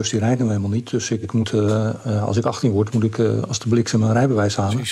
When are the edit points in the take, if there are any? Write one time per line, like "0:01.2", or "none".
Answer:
none